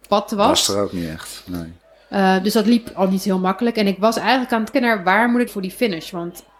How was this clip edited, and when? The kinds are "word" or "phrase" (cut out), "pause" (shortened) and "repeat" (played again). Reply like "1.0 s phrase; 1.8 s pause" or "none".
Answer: 4.7 s word; 5.5 s phrase